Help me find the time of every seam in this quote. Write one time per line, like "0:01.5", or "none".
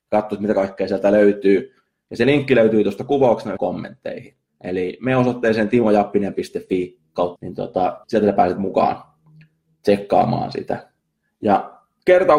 0:03.6
0:04.5
0:07.4
0:08.0